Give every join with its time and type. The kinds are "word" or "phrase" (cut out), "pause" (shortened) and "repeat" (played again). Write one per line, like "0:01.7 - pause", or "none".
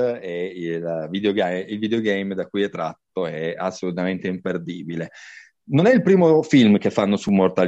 none